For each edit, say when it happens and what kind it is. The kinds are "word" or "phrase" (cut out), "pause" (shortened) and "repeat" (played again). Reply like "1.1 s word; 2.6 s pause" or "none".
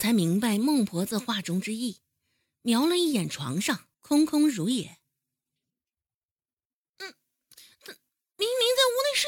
3.9 s pause